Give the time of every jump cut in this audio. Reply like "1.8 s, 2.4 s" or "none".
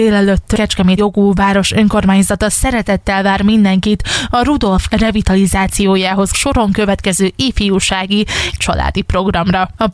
1.0 s, 4.9 s, 6.3 s, 8.5 s